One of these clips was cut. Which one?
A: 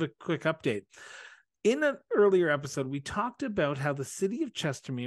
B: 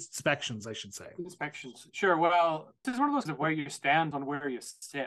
B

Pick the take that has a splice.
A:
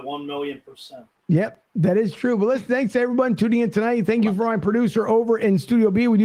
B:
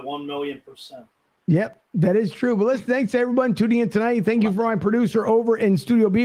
A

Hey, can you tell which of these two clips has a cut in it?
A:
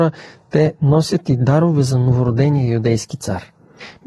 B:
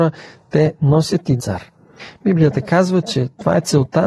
B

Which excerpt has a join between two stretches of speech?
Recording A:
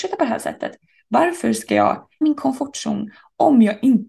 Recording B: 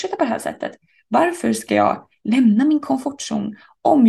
A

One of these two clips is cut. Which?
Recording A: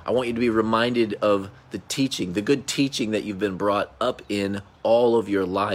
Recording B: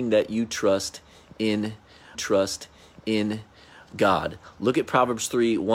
B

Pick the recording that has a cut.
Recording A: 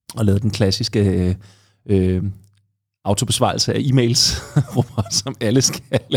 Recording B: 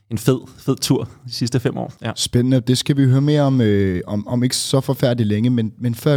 B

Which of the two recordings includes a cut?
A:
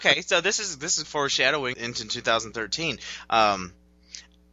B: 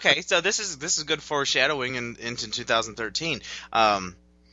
A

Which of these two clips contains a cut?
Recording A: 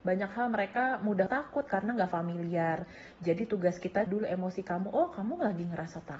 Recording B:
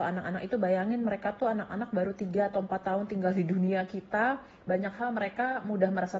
A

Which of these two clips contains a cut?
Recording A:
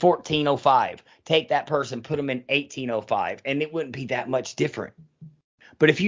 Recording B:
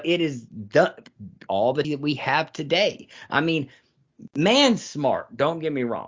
B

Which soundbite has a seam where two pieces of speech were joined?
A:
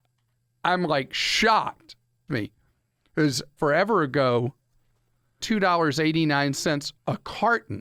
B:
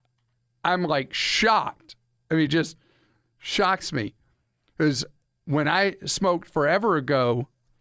A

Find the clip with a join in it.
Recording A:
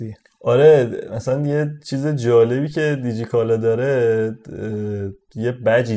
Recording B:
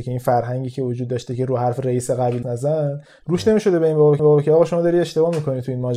B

